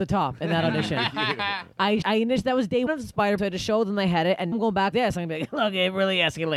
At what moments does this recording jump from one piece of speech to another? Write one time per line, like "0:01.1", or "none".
0:02.0
0:02.9
0:03.4
0:04.5
0:04.9